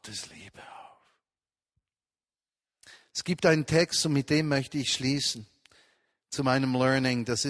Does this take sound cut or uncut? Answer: uncut